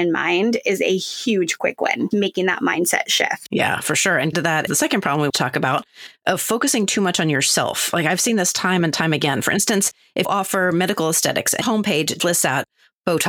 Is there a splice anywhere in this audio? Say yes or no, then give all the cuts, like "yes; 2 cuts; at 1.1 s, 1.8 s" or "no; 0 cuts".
yes; 7 cuts; at 2.1 s, 4.3 s, 4.7 s, 5.3 s, 10.2 s, 11.6 s, 12.2 s